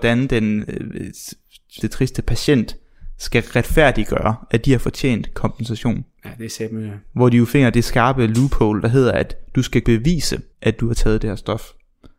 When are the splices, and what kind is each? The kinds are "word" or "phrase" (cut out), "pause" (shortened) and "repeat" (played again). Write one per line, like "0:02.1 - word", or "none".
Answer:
0:01.8 - word
0:09.8 - word
0:10.5 - pause